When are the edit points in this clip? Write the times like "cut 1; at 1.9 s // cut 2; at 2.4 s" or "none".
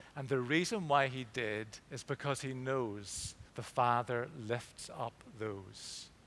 cut 1; at 1.8 s // cut 2; at 3.5 s